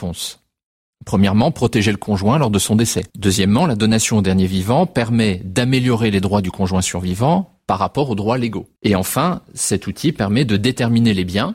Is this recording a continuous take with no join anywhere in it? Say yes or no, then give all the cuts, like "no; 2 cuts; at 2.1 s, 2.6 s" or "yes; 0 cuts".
no; 2 cuts; at 3.1 s, 8.8 s